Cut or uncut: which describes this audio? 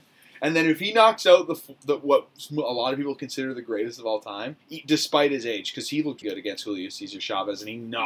cut